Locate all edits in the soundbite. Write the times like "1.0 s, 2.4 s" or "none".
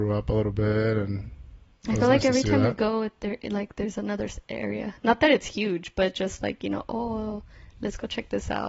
none